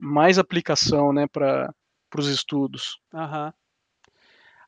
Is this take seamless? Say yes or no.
yes